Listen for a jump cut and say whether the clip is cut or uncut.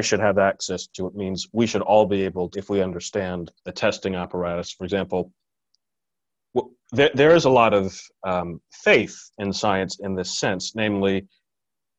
cut